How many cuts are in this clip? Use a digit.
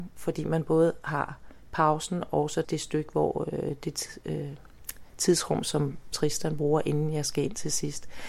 2